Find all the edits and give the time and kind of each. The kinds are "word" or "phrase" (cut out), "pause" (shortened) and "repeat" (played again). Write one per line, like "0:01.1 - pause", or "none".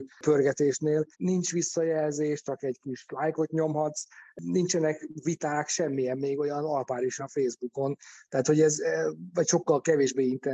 0:01.1 - pause
0:07.2 - word